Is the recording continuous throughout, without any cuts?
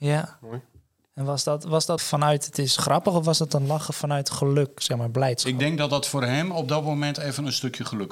no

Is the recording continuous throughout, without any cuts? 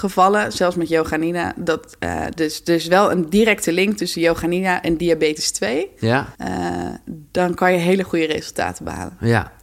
no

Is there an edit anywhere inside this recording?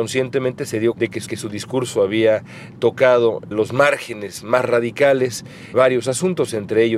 yes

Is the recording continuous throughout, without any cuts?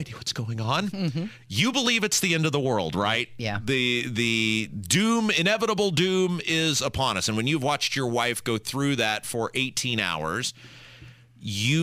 yes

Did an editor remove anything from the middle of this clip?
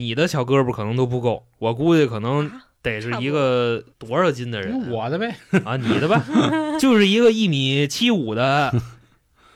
yes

